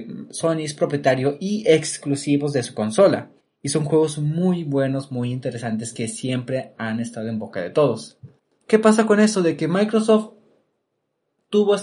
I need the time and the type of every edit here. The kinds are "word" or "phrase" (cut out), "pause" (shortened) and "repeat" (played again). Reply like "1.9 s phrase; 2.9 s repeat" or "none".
3.4 s pause; 8.4 s pause